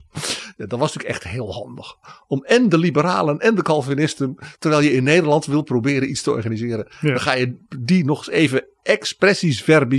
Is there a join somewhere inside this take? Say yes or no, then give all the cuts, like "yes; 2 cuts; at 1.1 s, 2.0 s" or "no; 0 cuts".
no; 0 cuts